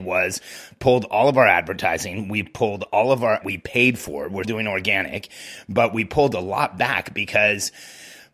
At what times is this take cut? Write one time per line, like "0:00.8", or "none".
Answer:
0:03.4
0:04.4